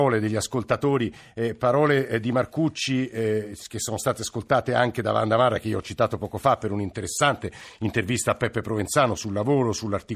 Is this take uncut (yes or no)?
yes